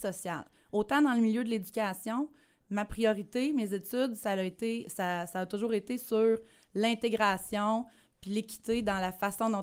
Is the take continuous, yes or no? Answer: yes